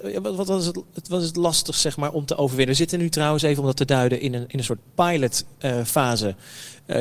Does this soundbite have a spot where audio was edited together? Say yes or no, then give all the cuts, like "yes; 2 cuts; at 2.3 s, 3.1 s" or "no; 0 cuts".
no; 0 cuts